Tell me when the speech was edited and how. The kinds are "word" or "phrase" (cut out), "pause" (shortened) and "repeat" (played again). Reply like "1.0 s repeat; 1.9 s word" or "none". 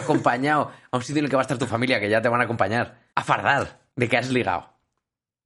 3.1 s pause; 3.9 s pause